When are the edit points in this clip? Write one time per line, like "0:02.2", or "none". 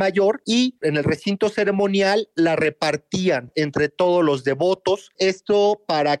0:05.1

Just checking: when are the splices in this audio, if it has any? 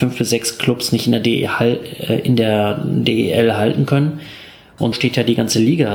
0:04.9

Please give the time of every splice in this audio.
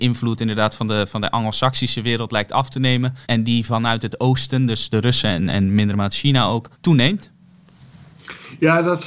0:03.2
0:06.7

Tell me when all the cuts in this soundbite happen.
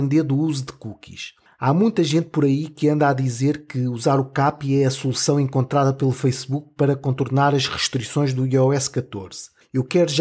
none

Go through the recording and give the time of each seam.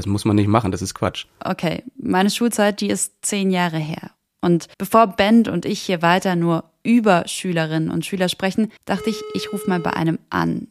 0:04.7
0:08.8

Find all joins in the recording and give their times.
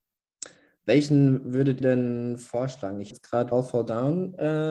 0:01.8
0:03.1
0:03.5

